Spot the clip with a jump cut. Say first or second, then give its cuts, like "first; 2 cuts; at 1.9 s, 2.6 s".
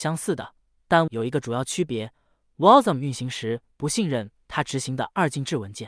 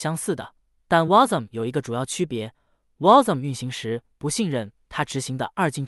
first; 1 cut; at 1.1 s